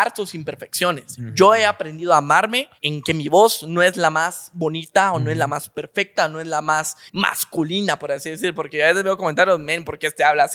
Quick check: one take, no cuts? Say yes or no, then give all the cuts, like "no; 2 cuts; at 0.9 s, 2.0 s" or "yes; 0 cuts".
no; 2 cuts; at 2.8 s, 7.1 s